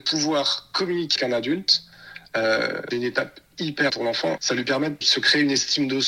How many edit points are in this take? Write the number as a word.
five